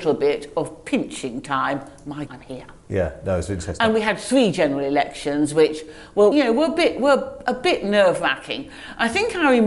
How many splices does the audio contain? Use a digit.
2